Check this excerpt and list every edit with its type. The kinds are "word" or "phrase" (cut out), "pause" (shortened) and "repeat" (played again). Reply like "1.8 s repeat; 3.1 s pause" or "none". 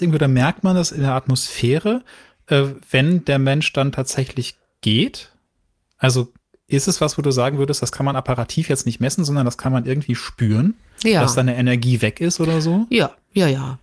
none